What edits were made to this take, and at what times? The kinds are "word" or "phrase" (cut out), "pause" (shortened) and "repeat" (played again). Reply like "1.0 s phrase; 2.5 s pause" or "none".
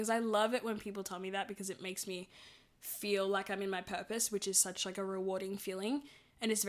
none